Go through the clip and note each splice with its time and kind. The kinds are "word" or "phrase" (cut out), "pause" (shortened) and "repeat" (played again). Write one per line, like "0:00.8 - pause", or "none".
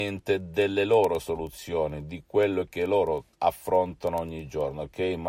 0:03.3 - pause